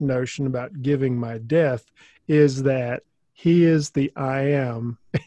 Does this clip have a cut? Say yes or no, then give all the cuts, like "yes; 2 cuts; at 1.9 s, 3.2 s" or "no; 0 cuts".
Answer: yes; 1 cut; at 3.1 s